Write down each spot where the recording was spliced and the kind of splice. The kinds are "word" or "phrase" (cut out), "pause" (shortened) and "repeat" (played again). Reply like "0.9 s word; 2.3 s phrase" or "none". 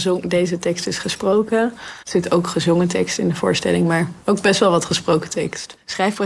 2.0 s pause

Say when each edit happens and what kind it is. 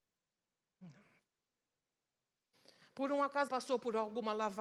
3.5 s word

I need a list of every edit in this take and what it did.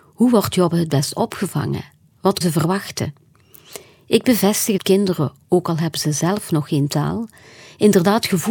2.4 s word; 4.8 s word

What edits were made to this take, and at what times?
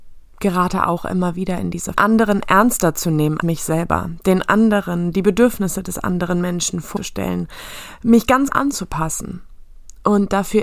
1.9 s phrase; 3.4 s word; 7.0 s phrase; 8.5 s phrase

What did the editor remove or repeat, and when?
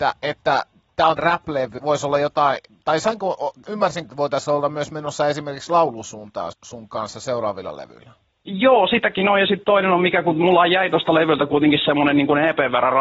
1.2 s word; 1.8 s word; 4.0 s word; 6.5 s word

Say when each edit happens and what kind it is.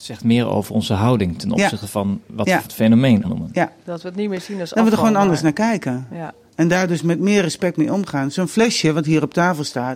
2.6 s word; 3.2 s word; 3.8 s pause

